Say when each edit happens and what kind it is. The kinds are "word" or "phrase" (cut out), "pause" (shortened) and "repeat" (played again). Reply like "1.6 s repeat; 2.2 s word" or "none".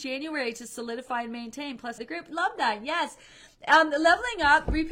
2.0 s phrase